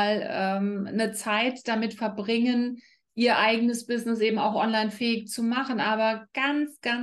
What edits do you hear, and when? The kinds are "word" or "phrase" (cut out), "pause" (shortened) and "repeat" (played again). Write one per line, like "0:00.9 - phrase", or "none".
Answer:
none